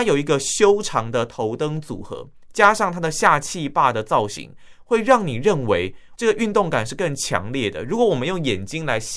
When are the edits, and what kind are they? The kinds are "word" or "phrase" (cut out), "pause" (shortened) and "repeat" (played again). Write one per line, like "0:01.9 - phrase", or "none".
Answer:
0:06.2 - word